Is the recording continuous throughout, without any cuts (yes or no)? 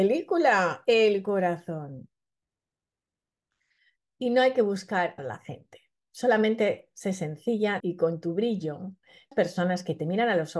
no